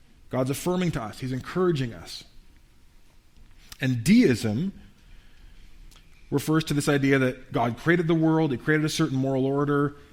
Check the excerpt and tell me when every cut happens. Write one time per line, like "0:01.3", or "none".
none

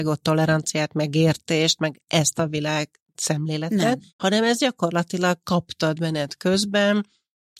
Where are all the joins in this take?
0:04.1

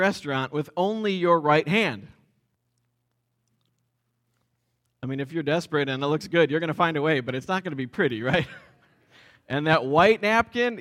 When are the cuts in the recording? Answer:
none

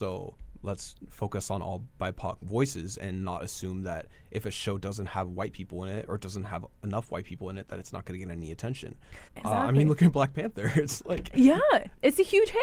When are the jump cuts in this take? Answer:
0:09.3

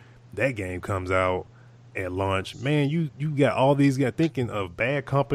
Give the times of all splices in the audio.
0:03.1

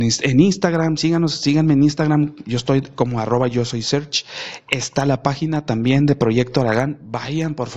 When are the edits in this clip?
none

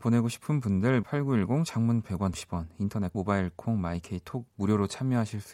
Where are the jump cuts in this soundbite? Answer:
0:01.0
0:02.3
0:03.1
0:04.5

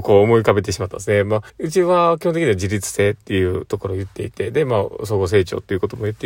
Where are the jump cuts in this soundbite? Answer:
0:01.5

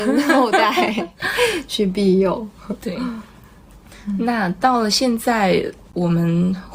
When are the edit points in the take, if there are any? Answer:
none

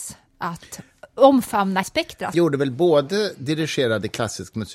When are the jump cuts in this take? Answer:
0:01.8
0:02.3

